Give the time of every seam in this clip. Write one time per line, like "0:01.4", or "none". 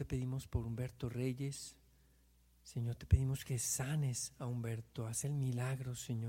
none